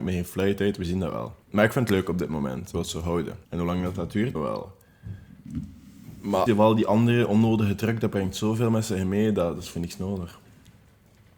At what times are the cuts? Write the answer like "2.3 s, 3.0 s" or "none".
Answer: 1.4 s, 2.7 s, 3.4 s, 4.4 s, 6.5 s